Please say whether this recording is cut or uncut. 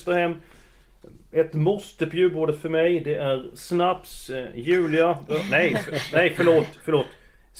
uncut